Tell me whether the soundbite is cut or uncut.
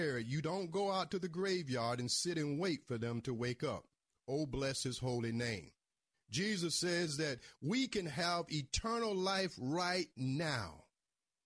uncut